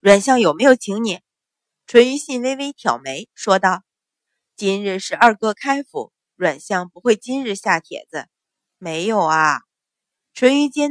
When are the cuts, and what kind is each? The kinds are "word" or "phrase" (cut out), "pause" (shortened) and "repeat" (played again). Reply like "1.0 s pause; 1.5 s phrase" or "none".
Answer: 8.3 s pause